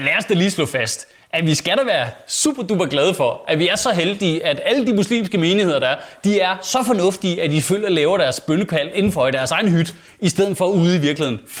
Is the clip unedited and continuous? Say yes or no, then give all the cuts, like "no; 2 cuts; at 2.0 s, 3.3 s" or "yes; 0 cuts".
yes; 0 cuts